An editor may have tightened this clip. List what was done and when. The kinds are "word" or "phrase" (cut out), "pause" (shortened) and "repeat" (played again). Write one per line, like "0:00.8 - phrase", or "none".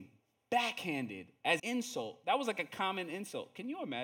0:01.6 - word